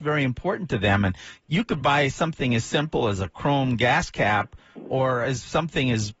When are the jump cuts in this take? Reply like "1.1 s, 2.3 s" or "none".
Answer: none